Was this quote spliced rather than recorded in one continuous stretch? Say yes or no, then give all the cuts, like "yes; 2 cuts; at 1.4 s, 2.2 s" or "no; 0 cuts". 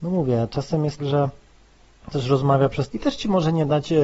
yes; 3 cuts; at 1.0 s, 2.1 s, 2.9 s